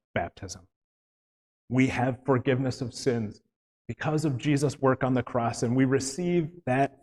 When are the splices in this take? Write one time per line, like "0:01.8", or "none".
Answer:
none